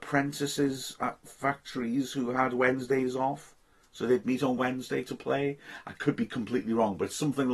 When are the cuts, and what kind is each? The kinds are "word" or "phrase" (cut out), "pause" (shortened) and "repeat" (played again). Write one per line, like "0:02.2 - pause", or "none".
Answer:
none